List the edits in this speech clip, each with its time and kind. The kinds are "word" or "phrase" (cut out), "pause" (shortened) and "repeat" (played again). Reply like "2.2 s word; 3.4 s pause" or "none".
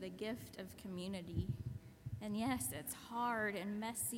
none